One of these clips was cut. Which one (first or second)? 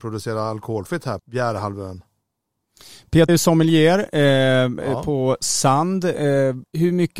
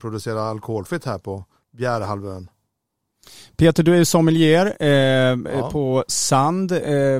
first